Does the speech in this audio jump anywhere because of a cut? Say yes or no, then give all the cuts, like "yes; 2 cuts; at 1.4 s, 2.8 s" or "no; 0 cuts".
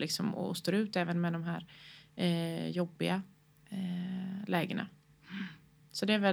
no; 0 cuts